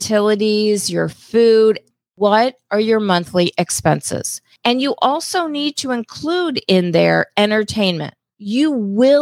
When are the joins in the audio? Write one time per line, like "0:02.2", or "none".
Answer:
none